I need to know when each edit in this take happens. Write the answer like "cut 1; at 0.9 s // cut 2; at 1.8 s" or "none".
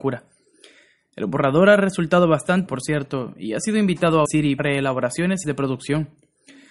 cut 1; at 2.7 s // cut 2; at 4.3 s // cut 3; at 4.6 s // cut 4; at 5.4 s

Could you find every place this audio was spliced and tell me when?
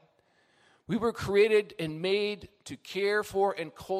none

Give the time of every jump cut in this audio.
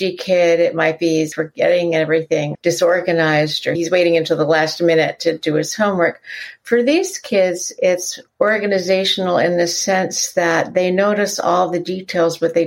cut 1; at 1.3 s // cut 2; at 2.5 s // cut 3; at 8.3 s

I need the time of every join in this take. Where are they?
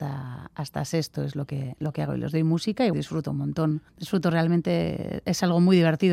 cut 1; at 2.9 s // cut 2; at 3.9 s

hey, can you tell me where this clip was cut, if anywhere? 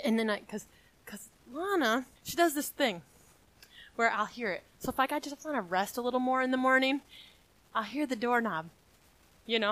cut 1; at 2.2 s

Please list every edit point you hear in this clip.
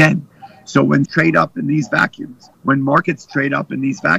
cut 1; at 1.1 s // cut 2; at 2.5 s

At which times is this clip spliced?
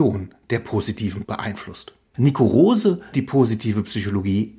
cut 1; at 1.2 s // cut 2; at 3.1 s

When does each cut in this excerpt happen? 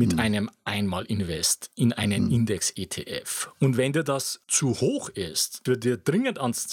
cut 1; at 4.4 s // cut 2; at 5.7 s

